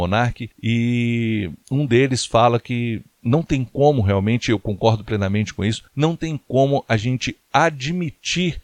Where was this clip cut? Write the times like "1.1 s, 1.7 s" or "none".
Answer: 5.9 s

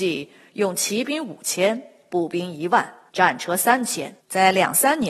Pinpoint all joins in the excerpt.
3.1 s, 4.2 s

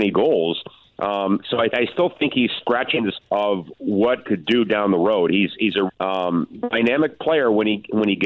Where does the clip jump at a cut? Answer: 1.7 s, 2.6 s, 3.1 s, 4.2 s, 5.9 s

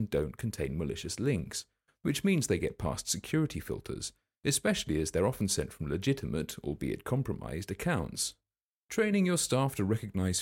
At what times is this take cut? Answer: none

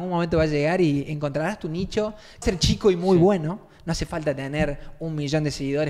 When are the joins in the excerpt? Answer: 2.4 s

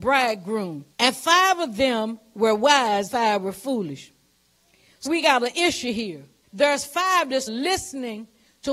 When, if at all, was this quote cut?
0.9 s, 3.1 s, 5.1 s, 6.4 s, 7.5 s

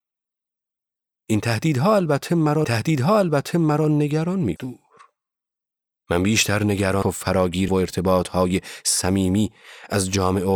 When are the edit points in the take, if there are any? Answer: 2.6 s, 4.6 s, 7.0 s, 7.7 s

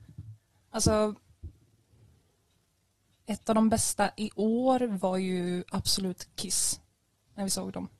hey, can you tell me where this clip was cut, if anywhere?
none

